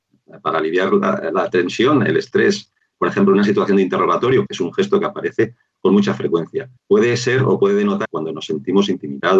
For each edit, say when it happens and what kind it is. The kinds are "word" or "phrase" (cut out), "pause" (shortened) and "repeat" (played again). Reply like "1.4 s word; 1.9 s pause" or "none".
4.5 s word; 6.8 s pause; 8.0 s word